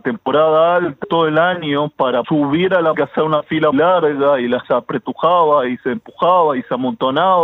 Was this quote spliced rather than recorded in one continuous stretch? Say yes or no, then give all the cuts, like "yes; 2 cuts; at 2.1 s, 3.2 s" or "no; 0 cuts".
yes; 5 cuts; at 1.0 s, 2.2 s, 2.9 s, 3.7 s, 4.6 s